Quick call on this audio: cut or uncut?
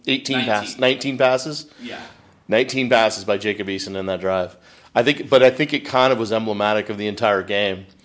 uncut